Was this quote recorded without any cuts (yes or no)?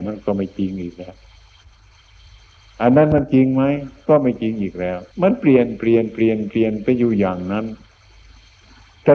no